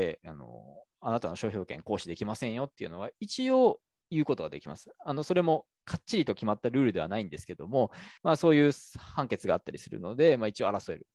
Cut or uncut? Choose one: cut